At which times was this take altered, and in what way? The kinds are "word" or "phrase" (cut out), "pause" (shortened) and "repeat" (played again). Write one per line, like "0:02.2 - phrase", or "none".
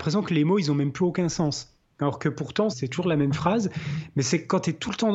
0:02.7 - word